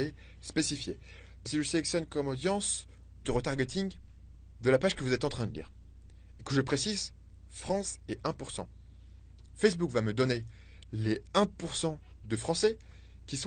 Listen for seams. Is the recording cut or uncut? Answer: cut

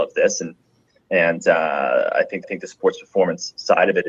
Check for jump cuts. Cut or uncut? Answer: cut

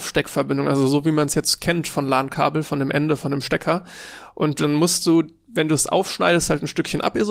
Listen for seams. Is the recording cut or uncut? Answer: uncut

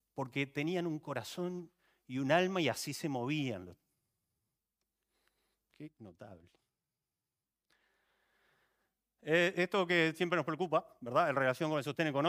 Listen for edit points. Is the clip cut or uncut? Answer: uncut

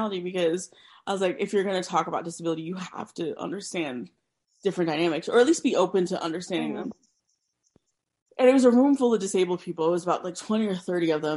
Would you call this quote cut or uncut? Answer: uncut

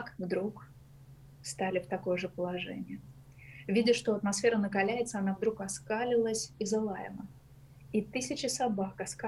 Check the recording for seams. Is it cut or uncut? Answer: uncut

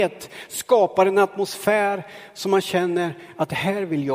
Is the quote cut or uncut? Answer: uncut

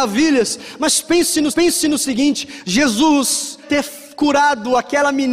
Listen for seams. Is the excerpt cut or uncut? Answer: cut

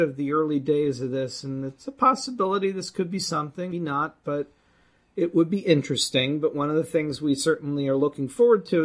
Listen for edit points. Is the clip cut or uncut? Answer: cut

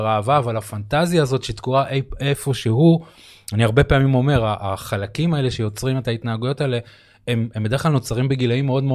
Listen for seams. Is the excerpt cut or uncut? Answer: uncut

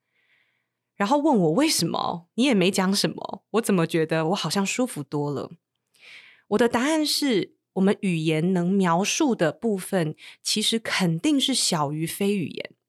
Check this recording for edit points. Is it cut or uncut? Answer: uncut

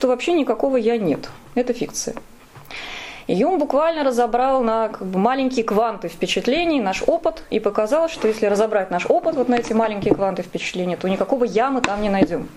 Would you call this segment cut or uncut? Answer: cut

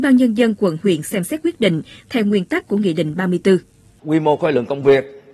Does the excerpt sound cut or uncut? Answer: uncut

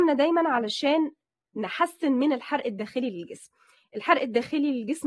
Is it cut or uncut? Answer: uncut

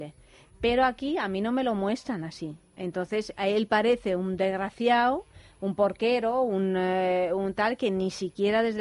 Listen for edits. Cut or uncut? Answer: uncut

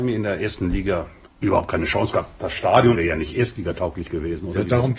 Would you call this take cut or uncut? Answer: cut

